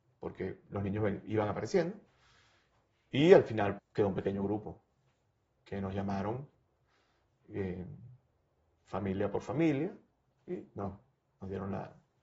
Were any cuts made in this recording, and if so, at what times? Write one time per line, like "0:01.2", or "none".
0:03.8